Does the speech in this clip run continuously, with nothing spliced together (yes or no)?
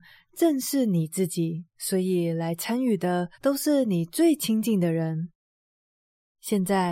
no